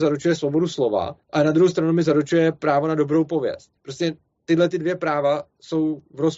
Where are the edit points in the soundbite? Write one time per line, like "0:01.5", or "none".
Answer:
0:01.2
0:03.8